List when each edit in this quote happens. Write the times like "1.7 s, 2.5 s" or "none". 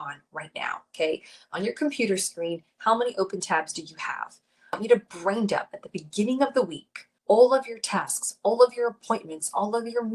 7.2 s